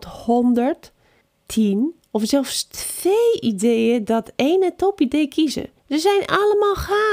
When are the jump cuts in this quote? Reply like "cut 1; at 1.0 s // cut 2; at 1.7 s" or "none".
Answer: cut 1; at 1.2 s // cut 2; at 5.8 s